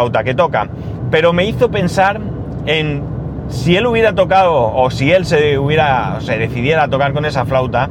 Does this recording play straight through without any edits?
yes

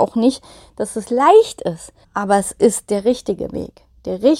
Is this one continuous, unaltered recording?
no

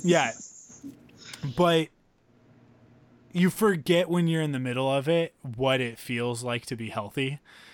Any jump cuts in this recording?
no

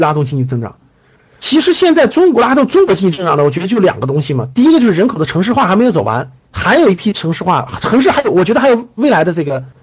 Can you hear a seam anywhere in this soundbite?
yes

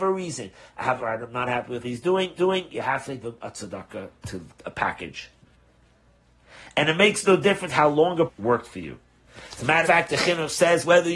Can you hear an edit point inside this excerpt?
yes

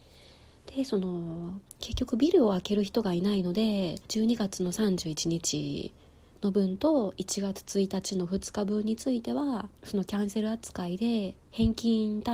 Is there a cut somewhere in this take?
yes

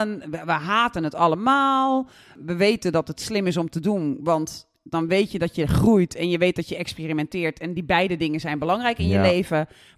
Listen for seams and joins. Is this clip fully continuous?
yes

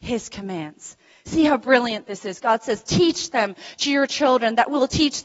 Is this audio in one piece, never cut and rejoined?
yes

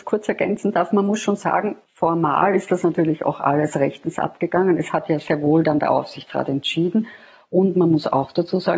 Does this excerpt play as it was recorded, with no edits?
yes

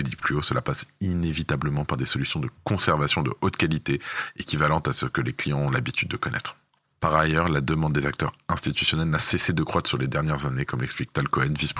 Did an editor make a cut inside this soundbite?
no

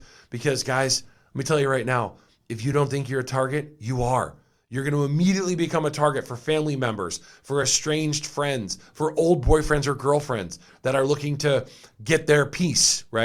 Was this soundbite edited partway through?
no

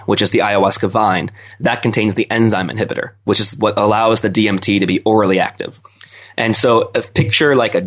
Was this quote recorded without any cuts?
yes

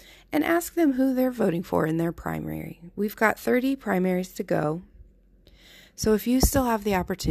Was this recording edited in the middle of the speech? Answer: no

